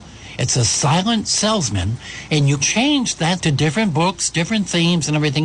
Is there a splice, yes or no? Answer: yes